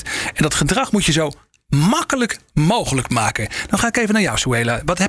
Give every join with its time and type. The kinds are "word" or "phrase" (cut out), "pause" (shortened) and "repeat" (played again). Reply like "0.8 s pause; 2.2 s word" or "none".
none